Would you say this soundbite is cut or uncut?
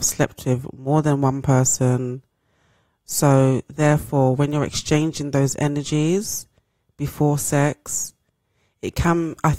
uncut